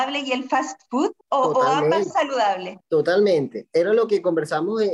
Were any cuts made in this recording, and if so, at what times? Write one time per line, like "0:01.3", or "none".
0:01.2
0:02.1
0:02.8